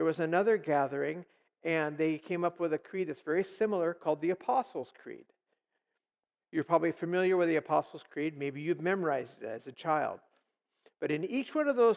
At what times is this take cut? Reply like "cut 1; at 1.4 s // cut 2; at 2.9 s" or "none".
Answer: none